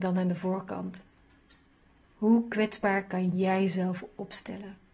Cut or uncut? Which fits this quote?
uncut